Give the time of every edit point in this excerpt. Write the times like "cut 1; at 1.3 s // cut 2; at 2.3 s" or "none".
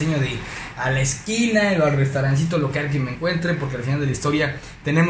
none